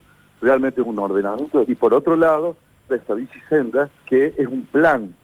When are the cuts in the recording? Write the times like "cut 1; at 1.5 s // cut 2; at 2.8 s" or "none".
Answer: cut 1; at 1.7 s // cut 2; at 2.9 s // cut 3; at 4.0 s